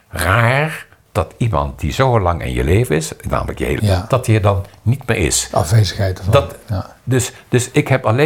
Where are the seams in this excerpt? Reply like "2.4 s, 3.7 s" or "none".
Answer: 3.8 s